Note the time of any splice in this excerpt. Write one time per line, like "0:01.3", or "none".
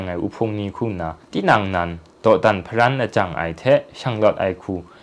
0:01.2